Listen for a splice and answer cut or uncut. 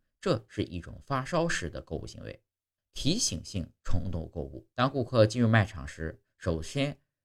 cut